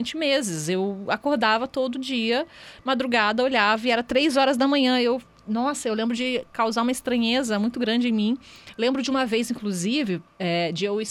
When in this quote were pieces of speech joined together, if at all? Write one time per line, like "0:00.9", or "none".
none